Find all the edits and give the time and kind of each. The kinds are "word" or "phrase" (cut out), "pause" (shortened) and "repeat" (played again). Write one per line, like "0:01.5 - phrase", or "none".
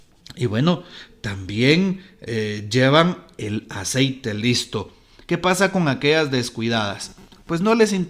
none